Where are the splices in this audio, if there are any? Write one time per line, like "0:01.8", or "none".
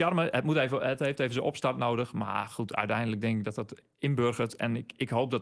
none